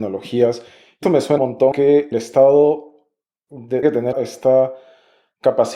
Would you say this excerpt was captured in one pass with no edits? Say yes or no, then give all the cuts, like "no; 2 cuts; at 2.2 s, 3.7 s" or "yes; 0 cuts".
no; 6 cuts; at 1.0 s, 1.4 s, 1.7 s, 2.1 s, 3.8 s, 4.1 s